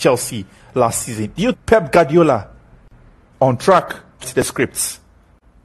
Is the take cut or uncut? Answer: cut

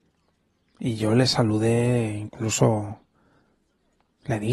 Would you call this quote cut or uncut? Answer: uncut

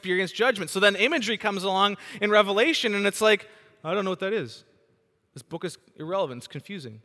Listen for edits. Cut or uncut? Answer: uncut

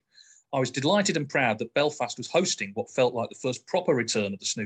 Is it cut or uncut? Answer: uncut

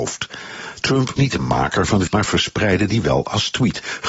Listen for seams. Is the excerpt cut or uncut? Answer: cut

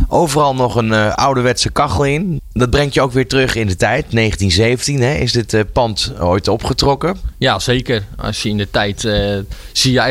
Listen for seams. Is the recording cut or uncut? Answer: uncut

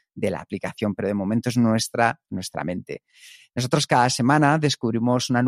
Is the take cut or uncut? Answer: cut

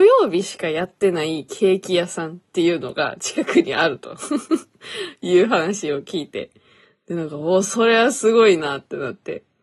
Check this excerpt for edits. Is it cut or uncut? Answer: uncut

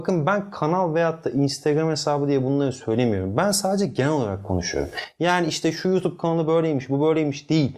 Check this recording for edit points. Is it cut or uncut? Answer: uncut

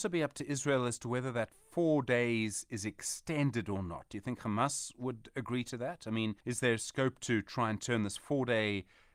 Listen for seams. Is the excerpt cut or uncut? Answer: cut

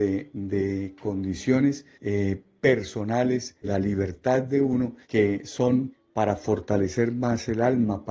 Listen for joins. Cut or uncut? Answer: cut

